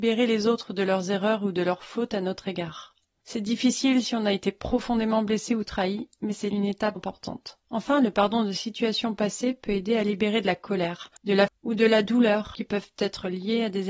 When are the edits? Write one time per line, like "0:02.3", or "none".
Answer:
0:03.1
0:07.0
0:07.6
0:11.2
0:11.5